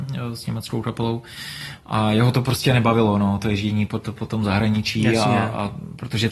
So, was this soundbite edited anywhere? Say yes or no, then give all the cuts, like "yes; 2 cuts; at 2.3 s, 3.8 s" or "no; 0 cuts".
no; 0 cuts